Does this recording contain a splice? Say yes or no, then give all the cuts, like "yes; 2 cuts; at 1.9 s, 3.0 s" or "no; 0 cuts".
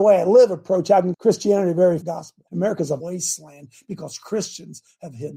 yes; 4 cuts; at 1.1 s, 2.0 s, 2.5 s, 3.0 s